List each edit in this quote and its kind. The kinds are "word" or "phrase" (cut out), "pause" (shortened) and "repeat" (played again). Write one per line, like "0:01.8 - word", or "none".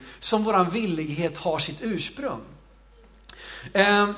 none